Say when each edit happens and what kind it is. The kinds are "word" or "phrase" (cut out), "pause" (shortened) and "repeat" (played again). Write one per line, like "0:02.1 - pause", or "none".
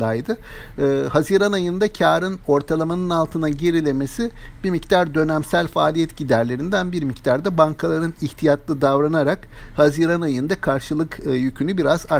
none

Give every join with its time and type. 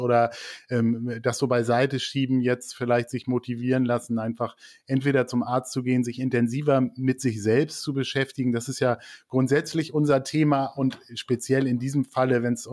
none

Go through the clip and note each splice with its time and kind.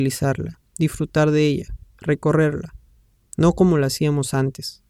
none

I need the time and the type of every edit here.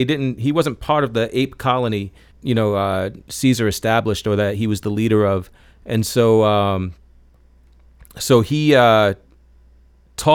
0:02.3 - word

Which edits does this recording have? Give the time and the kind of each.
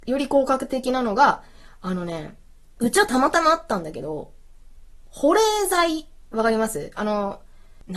none

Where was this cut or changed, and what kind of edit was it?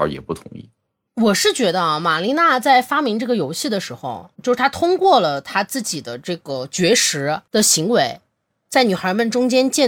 0:04.3 - pause

